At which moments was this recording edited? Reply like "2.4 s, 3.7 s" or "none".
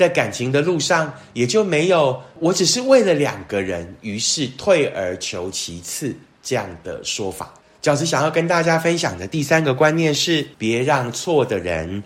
7.6 s, 10.5 s